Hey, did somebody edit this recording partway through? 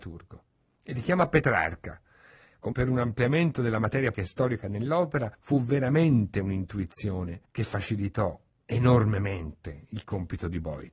yes; 4 cuts; at 2.7 s, 4.1 s, 5.3 s, 7.4 s

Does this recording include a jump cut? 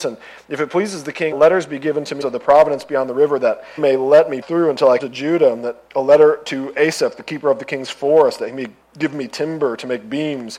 yes; 7 cuts; at 1.3 s, 2.2 s, 3.8 s, 4.4 s, 5.0 s, 5.9 s, 8.8 s

